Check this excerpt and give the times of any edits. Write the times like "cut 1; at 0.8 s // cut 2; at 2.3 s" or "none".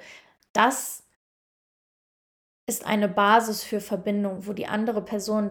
none